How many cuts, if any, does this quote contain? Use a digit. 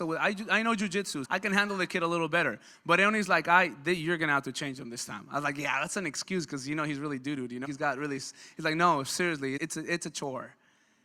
3